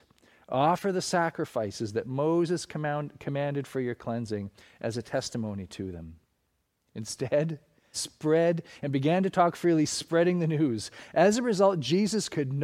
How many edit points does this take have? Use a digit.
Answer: 1